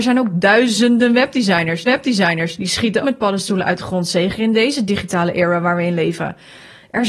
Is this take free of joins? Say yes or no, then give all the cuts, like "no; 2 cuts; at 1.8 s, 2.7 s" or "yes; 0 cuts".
no; 2 cuts; at 1.9 s, 3.0 s